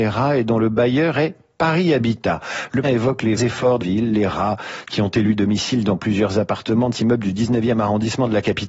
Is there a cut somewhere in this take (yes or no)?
yes